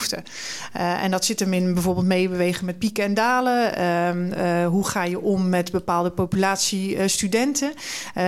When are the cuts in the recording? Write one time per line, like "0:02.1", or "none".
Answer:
none